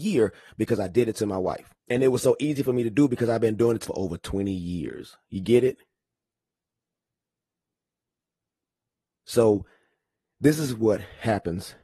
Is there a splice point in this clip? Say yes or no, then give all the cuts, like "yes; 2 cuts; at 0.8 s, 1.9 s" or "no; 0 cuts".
yes; 2 cuts; at 1.8 s, 3.8 s